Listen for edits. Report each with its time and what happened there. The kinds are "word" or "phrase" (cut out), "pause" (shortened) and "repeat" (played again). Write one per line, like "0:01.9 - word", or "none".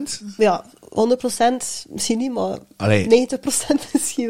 none